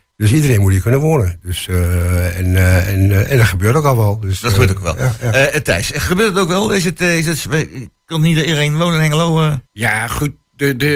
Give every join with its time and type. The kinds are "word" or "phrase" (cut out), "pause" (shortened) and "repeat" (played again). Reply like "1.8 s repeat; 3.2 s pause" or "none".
9.7 s pause